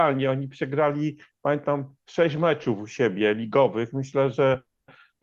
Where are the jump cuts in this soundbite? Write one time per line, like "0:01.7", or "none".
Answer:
none